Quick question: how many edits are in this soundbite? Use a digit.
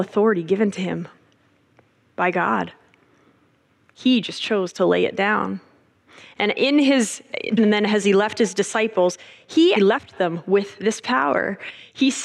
2